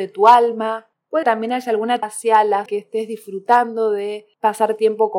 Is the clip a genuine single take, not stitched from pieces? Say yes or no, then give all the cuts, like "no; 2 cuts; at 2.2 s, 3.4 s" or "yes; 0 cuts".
no; 3 cuts; at 1.2 s, 2.0 s, 2.7 s